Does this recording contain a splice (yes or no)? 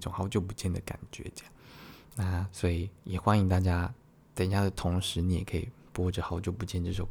yes